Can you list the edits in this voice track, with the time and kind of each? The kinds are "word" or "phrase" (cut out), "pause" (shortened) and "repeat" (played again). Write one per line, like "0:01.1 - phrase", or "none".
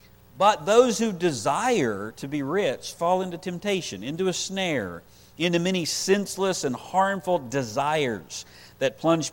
none